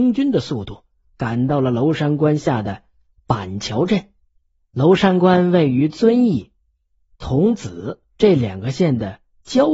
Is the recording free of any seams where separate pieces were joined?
yes; 0 cuts

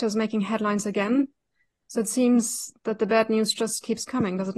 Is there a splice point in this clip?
no; 0 cuts

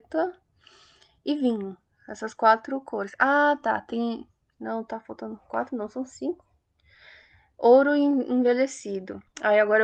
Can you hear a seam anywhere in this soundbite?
no; 0 cuts

